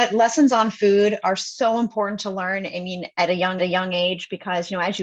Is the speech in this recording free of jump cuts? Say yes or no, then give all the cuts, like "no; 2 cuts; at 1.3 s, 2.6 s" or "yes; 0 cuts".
no; 1 cut; at 3.6 s